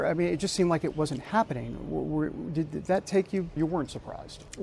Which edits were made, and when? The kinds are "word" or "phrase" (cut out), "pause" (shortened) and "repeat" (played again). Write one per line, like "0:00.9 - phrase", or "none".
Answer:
0:03.6 - phrase